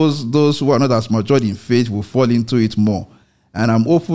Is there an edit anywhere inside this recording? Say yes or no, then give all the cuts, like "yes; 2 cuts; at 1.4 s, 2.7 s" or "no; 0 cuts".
no; 0 cuts